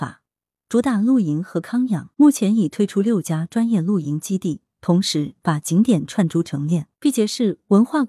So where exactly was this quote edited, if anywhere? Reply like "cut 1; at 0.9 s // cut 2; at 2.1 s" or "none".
cut 1; at 2.1 s // cut 2; at 6.9 s